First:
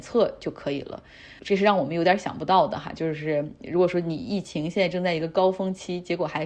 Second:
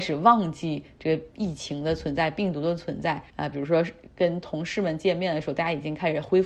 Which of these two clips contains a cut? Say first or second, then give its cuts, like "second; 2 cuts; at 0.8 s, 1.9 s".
second; 1 cut; at 3.3 s